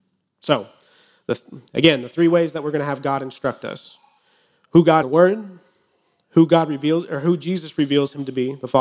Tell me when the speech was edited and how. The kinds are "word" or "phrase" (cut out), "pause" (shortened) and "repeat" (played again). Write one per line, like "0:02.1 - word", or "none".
0:05.0 - phrase